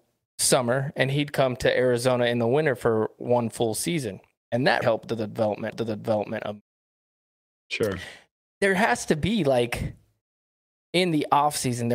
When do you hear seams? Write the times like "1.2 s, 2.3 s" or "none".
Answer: 4.8 s, 5.7 s

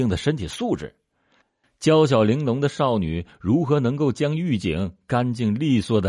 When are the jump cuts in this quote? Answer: none

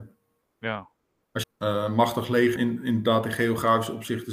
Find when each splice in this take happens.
1.4 s, 2.6 s

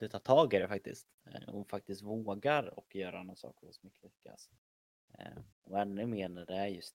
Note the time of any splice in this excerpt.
5.5 s

